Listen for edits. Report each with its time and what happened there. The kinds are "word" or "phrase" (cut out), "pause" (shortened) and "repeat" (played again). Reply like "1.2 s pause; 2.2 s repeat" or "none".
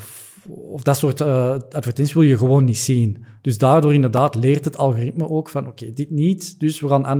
none